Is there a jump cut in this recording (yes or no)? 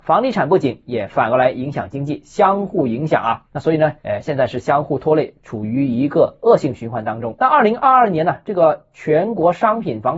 no